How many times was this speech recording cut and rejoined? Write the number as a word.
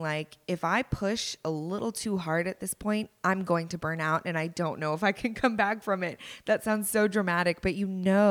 zero